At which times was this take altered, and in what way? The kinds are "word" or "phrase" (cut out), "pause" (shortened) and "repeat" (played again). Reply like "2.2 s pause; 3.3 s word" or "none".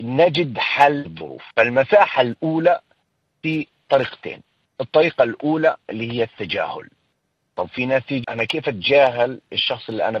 1.1 s word; 1.5 s pause; 8.2 s word